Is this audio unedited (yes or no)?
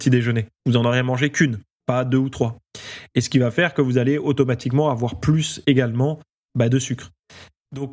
yes